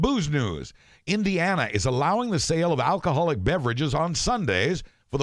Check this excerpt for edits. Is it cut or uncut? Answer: uncut